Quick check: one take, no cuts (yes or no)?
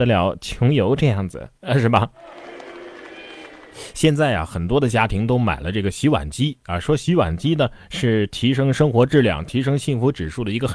no